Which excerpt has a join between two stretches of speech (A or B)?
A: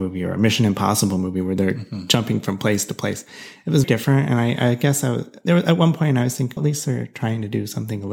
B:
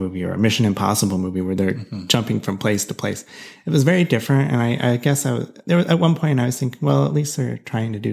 A